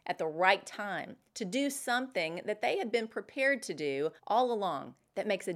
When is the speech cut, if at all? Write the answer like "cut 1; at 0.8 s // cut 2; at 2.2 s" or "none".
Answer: cut 1; at 4.2 s